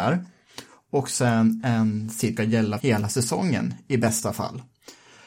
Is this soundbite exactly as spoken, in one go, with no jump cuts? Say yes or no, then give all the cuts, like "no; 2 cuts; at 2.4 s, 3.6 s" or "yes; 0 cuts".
no; 2 cuts; at 2.4 s, 2.8 s